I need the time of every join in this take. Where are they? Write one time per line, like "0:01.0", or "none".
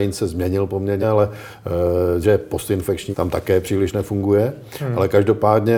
0:01.0
0:02.2
0:03.1